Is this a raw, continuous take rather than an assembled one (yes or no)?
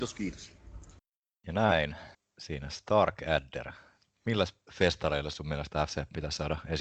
no